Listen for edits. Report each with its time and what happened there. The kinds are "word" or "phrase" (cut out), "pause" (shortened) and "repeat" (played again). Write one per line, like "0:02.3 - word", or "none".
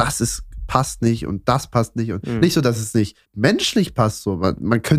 0:03.2 - pause

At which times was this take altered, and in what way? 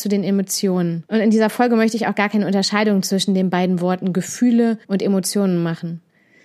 0:01.0 - pause
0:04.8 - pause

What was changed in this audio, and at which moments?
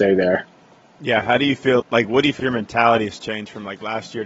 0:01.8 - word
0:02.4 - word

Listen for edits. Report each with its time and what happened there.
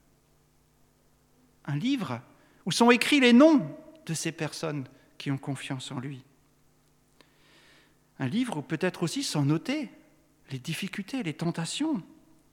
none

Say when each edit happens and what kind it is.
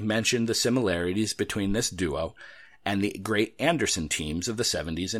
none

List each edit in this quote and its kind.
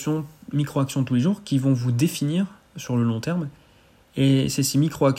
none

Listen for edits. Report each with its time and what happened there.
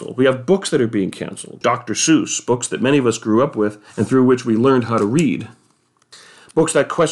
0:03.9 - pause

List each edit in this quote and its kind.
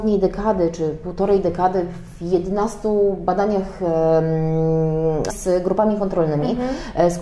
0:05.3 - word

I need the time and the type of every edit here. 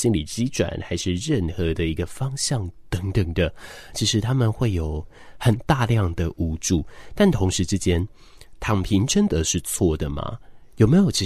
0:03.9 - phrase

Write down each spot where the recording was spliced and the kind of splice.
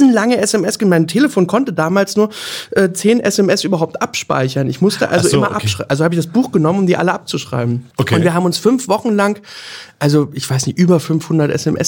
0:07.9 - pause

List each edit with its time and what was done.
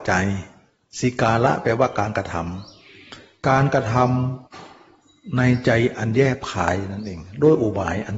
0:04.5 - pause

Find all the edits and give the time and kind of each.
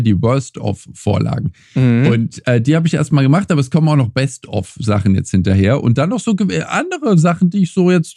none

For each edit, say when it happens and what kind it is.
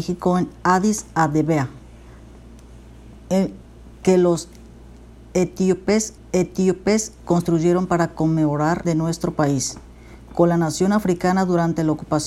0:06.2 - repeat
0:08.8 - phrase

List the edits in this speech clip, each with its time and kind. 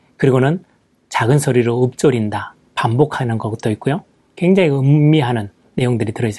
none

